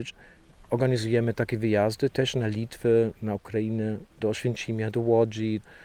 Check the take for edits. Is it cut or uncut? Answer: cut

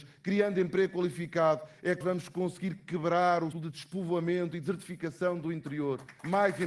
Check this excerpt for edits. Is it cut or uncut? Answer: cut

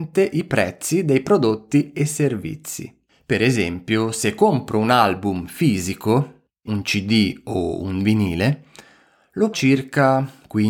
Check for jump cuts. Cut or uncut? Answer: cut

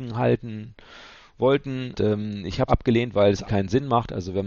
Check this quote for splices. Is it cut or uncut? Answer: cut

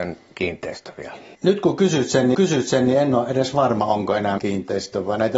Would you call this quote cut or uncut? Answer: cut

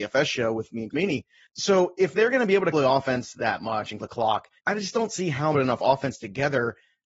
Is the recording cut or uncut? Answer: cut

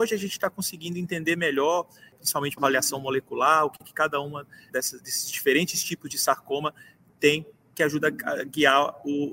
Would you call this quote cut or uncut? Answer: cut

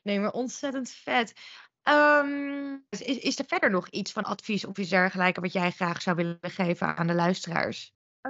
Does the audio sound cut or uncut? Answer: cut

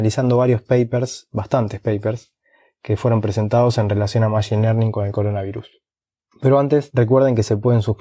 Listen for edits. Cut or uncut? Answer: uncut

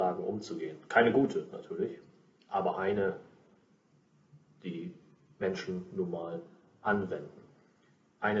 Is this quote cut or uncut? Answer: uncut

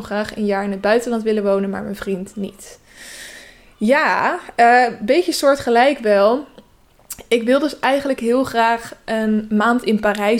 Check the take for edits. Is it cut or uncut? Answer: uncut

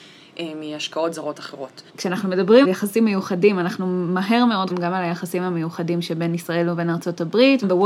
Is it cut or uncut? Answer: cut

